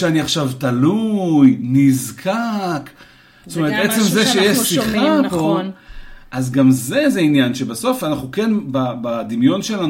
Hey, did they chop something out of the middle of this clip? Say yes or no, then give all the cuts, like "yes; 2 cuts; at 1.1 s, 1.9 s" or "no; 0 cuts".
no; 0 cuts